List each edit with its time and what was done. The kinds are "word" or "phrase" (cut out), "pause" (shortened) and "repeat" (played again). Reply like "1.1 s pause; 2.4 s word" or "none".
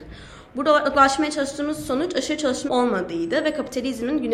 2.7 s phrase